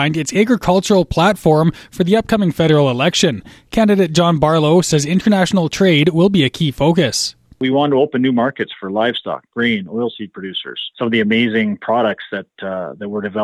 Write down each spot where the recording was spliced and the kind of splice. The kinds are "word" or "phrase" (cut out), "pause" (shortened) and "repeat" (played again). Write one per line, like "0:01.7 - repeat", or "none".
none